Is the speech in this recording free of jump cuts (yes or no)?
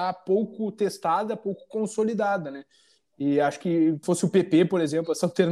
no